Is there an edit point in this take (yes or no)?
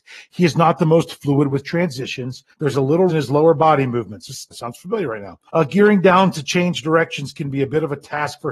yes